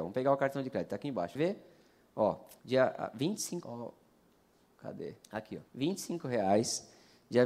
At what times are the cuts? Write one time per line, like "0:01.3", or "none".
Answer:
0:01.3
0:02.6
0:03.6
0:05.2
0:05.7